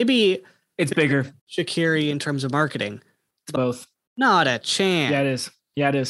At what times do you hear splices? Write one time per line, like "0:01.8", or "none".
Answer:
0:01.4
0:03.6